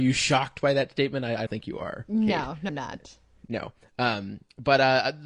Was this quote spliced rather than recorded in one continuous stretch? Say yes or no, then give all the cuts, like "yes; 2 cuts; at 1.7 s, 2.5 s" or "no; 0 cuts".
yes; 2 cuts; at 1.5 s, 2.7 s